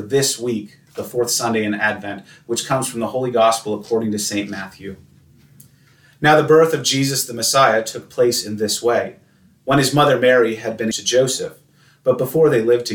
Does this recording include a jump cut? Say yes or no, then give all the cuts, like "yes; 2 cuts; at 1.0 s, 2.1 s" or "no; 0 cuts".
yes; 1 cut; at 10.9 s